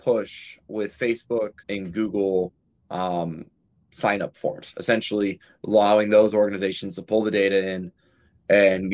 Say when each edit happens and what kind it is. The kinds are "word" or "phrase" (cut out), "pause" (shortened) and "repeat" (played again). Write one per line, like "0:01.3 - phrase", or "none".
0:01.6 - pause